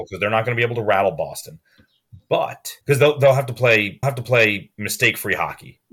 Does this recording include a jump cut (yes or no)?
yes